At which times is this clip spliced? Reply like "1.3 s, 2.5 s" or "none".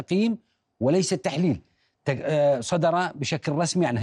none